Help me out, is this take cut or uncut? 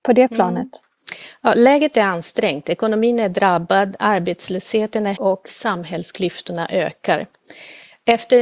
cut